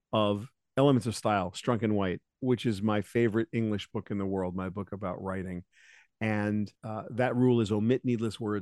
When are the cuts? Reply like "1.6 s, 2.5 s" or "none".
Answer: 2.3 s, 6.8 s